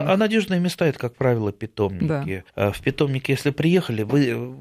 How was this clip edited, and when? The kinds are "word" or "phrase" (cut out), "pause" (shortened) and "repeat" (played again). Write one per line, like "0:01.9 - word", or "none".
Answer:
0:02.5 - pause